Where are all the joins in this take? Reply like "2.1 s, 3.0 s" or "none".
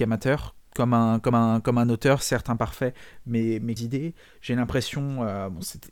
1.3 s, 3.8 s